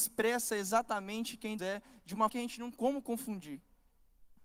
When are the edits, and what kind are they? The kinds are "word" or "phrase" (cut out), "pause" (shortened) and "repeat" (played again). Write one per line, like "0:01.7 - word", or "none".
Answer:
0:01.6 - word
0:02.3 - word
0:02.7 - word